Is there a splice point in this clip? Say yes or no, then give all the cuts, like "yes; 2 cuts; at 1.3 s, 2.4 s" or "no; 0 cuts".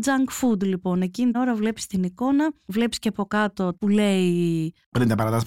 yes; 2 cuts; at 1.3 s, 3.8 s